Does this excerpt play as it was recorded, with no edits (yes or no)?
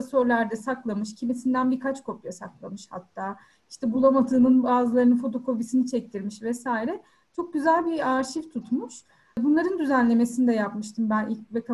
yes